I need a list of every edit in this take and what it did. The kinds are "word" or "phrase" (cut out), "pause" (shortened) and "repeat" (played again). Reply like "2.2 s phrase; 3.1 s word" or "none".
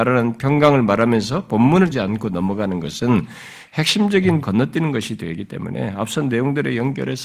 1.9 s word; 4.4 s word